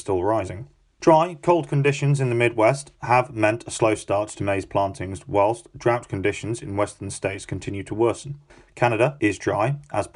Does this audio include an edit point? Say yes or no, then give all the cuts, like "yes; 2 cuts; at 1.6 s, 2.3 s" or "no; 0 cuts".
no; 0 cuts